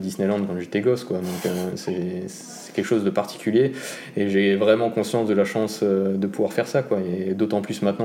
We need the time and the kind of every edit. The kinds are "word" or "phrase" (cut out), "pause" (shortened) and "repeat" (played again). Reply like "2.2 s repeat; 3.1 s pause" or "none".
none